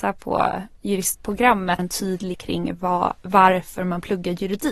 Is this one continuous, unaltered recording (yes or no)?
no